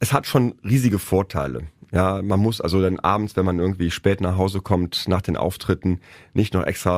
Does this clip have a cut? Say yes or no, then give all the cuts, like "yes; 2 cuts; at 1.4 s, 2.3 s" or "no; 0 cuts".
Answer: no; 0 cuts